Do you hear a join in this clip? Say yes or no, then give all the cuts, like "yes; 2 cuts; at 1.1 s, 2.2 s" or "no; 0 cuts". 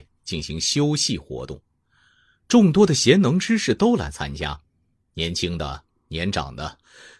no; 0 cuts